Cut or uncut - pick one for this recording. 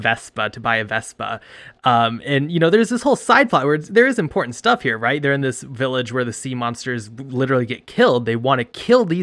uncut